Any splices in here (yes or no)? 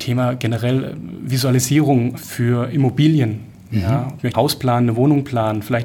yes